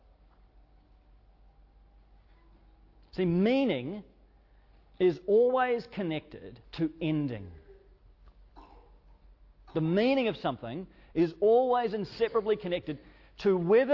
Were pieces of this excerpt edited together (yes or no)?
yes